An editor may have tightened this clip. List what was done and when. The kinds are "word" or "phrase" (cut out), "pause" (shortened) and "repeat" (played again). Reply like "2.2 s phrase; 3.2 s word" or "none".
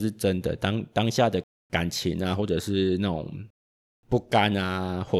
none